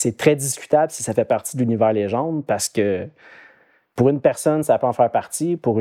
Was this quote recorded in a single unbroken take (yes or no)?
yes